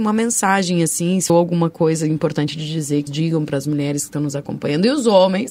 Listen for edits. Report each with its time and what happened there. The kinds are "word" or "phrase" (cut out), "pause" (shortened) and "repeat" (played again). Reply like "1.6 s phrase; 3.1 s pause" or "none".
1.3 s word; 3.1 s word

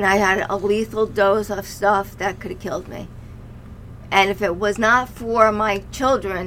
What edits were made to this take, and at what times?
none

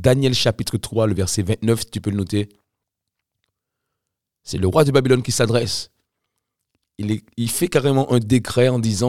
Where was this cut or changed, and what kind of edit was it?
none

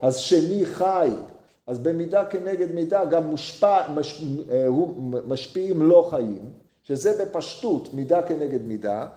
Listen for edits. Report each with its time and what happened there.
none

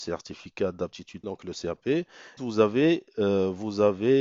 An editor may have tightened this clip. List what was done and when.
1.2 s word; 2.4 s word

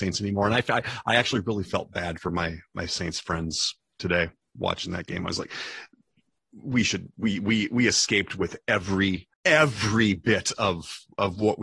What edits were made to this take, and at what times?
9.3 s pause

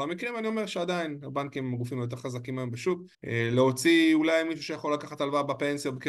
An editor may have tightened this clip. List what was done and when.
3.1 s pause

